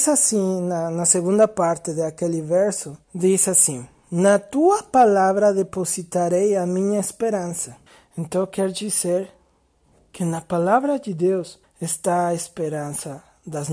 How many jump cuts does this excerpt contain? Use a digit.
3